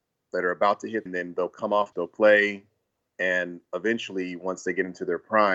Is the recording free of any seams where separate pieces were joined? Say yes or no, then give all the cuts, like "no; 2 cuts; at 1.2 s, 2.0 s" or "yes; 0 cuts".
no; 2 cuts; at 1.1 s, 1.9 s